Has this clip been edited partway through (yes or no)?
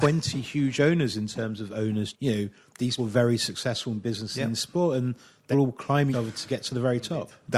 yes